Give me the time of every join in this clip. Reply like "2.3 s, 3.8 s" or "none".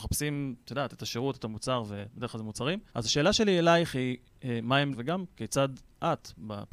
2.9 s, 4.9 s